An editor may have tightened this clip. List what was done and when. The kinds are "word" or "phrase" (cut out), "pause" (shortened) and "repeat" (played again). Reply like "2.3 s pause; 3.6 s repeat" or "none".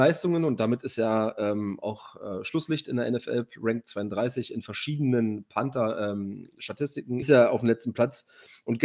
7.2 s phrase